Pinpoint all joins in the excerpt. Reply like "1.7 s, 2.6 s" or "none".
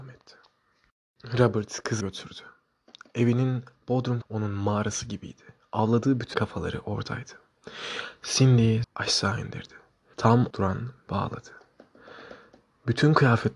2.0 s, 4.2 s, 6.3 s, 8.8 s, 10.1 s, 10.5 s, 11.1 s